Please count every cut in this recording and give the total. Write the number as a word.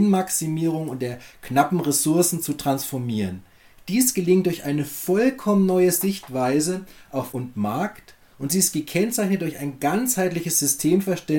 one